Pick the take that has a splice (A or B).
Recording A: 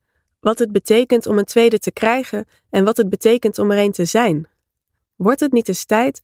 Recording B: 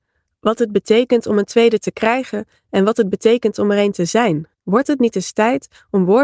B